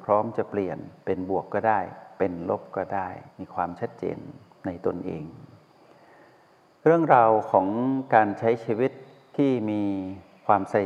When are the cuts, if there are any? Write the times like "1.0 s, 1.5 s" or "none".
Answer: 3.3 s